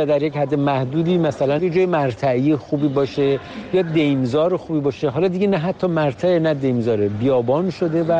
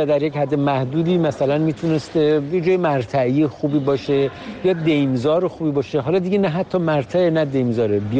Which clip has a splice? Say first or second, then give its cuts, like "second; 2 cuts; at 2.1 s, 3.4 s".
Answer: first; 1 cut; at 1.6 s